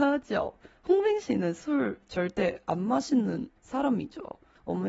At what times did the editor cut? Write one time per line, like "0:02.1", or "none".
0:03.6